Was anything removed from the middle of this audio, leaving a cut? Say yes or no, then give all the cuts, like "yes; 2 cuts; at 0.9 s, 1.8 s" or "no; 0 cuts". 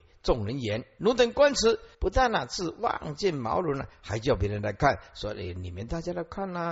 yes; 1 cut; at 1.9 s